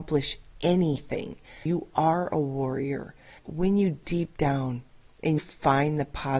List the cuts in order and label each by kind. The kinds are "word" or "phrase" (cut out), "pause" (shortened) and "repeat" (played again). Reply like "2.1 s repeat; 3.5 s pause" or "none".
1.7 s word; 3.4 s word; 4.0 s word; 5.4 s word

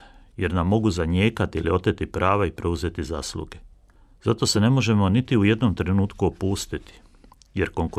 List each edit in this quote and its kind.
none

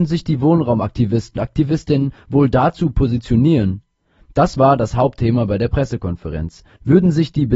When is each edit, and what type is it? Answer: 1.4 s word

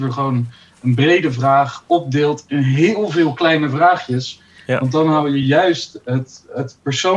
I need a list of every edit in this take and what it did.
none

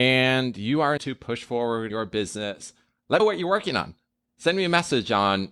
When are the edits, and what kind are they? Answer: 1.0 s phrase; 1.9 s word; 3.2 s phrase

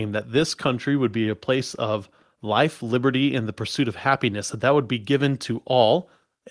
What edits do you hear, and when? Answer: none

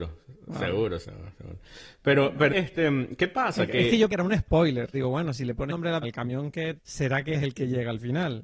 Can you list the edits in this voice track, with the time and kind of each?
1.0 s word; 2.5 s word; 4.1 s word; 4.9 s word; 5.7 s word; 6.0 s word; 6.8 s word; 7.3 s word

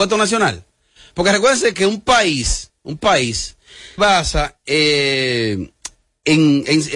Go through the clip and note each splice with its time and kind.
1.7 s word; 4.0 s word

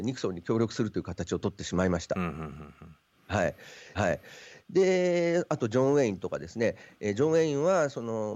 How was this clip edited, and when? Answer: 3.9 s repeat

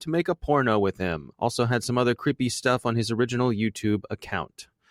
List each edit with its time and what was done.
1.3 s pause

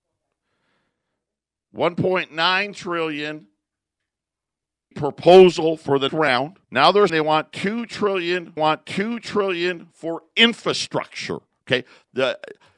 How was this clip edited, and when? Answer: 4.9 s phrase; 6.1 s word; 6.6 s pause; 7.1 s word; 8.6 s repeat

